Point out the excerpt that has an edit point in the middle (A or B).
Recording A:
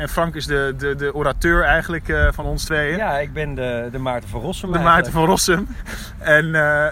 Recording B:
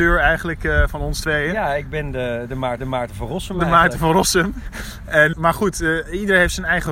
B